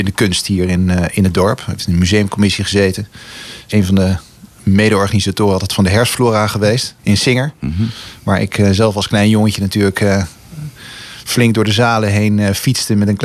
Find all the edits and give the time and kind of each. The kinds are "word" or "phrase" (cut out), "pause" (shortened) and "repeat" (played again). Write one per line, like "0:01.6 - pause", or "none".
0:03.7 - word
0:07.0 - word